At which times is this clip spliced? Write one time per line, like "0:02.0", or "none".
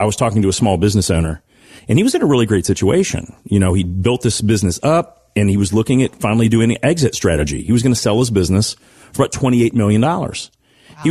none